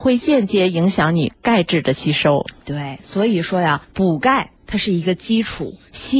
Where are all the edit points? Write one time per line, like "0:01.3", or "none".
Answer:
0:03.8
0:04.6

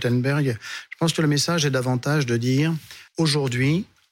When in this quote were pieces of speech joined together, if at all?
0:03.1

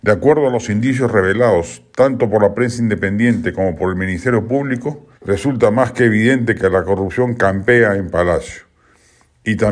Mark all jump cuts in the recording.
0:05.1

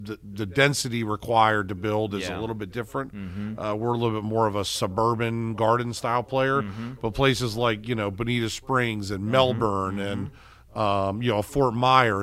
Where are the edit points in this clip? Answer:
none

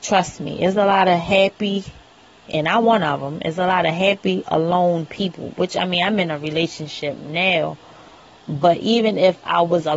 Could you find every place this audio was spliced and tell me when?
none

